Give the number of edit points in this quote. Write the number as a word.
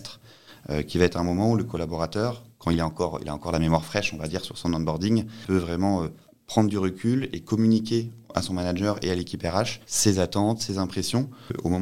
two